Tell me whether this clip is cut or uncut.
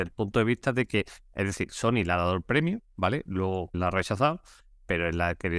cut